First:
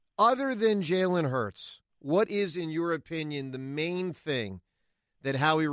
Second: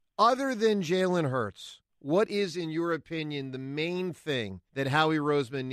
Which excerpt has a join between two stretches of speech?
second; 1 cut; at 4.7 s

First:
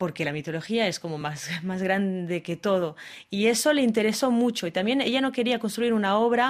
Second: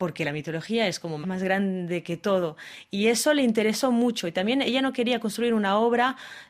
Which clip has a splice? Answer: second; 1 cut; at 1.2 s

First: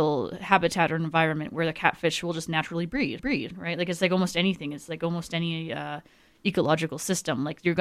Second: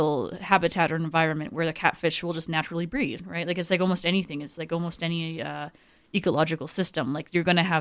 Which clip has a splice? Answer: first; 1 cut; at 3.2 s

